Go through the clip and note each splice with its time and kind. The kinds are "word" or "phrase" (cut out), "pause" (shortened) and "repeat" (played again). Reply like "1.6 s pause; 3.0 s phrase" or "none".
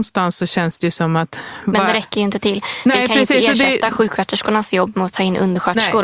none

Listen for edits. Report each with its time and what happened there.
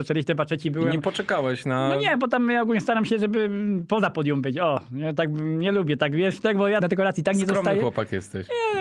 6.8 s word

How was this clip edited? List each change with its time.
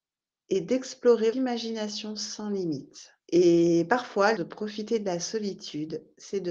1.3 s word; 3.2 s pause; 4.4 s phrase

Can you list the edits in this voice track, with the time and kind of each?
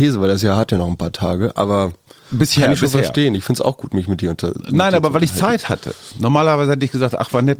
none

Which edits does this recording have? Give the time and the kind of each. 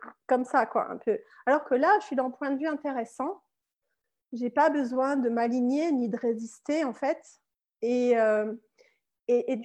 none

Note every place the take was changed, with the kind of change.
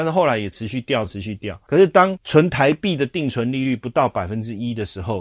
1.1 s phrase

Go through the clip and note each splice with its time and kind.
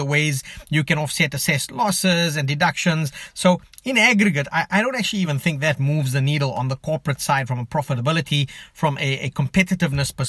none

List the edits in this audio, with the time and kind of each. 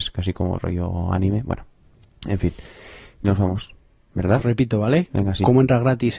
2.0 s pause; 3.2 s word; 4.4 s word

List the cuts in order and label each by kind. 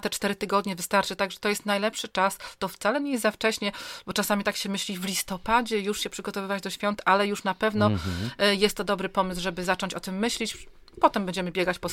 none

